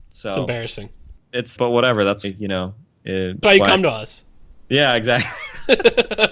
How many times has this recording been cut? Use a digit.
3